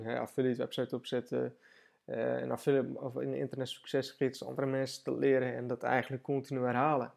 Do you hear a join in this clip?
no; 0 cuts

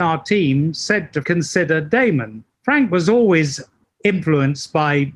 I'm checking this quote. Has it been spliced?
yes; 3 cuts; at 1.2 s, 2.5 s, 3.8 s

